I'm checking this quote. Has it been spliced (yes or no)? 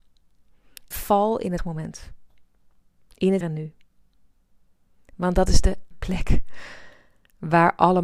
yes